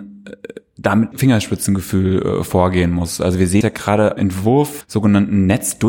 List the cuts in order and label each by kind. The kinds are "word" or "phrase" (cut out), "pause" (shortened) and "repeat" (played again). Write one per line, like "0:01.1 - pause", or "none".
0:01.1 - word
0:03.6 - word
0:04.2 - word
0:04.8 - word